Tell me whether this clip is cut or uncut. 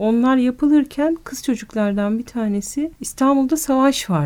cut